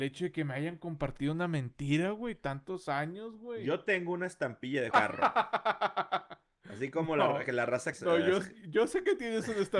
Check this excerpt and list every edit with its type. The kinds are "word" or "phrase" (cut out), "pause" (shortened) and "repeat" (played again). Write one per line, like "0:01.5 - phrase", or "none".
0:04.9 - phrase
0:07.9 - phrase

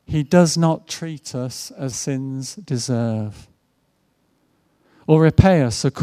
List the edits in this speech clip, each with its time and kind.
0:01.9 - word

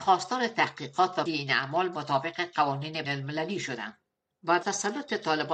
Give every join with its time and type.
0:01.3 - word
0:03.0 - word
0:04.6 - word

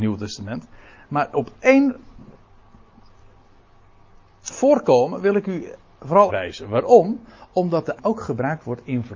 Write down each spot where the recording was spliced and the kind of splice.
0:04.5 - word
0:06.3 - word
0:08.0 - word

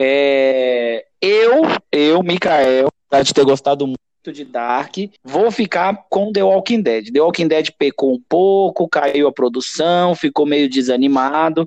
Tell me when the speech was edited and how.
0:05.2 - pause

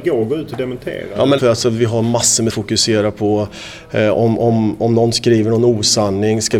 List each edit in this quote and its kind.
0:01.4 - phrase
0:02.5 - phrase

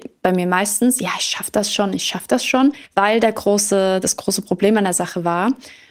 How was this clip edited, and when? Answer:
0:02.9 - pause

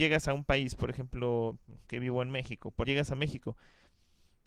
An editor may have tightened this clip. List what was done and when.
0:01.9 - word
0:02.8 - word

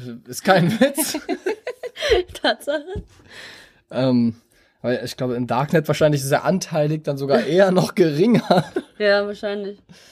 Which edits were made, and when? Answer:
none

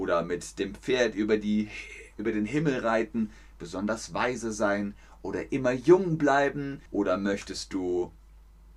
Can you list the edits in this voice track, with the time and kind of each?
0:06.9 - pause

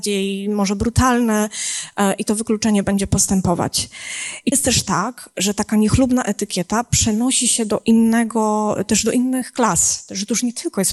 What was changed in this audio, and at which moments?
0:04.5 - word

